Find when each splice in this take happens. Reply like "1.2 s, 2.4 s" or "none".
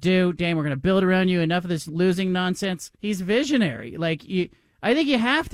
2.9 s